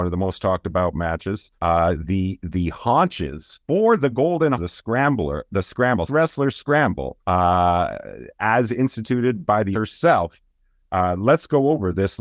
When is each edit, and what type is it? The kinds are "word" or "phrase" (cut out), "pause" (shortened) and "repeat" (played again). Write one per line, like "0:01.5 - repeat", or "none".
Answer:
0:01.5 - pause
0:03.6 - pause
0:04.5 - word
0:06.1 - word
0:07.2 - pause
0:09.7 - word